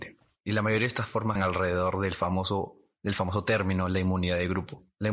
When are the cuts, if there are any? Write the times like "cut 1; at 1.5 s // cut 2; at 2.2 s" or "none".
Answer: cut 1; at 1.4 s